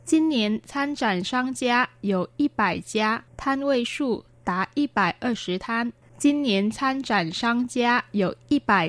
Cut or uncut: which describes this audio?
cut